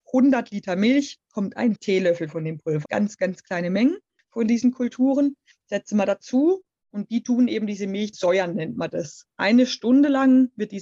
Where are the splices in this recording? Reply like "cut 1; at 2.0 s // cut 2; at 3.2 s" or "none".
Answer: cut 1; at 1.8 s // cut 2; at 2.8 s // cut 3; at 8.1 s